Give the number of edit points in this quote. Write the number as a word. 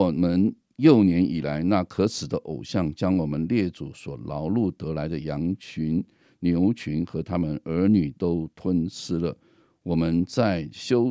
zero